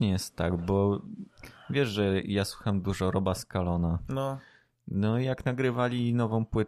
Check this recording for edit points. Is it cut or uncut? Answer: uncut